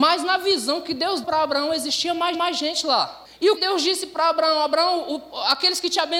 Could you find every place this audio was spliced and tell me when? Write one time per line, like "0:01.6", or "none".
0:01.2
0:02.3
0:03.2
0:03.6